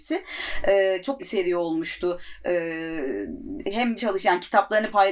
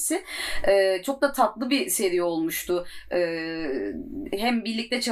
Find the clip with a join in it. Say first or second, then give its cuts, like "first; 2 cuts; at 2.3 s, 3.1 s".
first; 2 cuts; at 1.2 s, 4.0 s